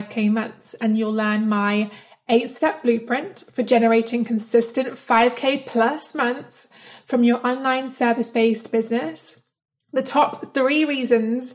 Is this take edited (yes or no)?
no